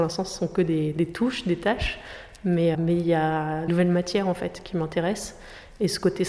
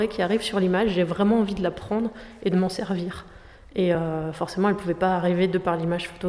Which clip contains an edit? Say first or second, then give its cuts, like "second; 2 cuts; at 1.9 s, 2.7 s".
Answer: first; 2 cuts; at 2.7 s, 3.7 s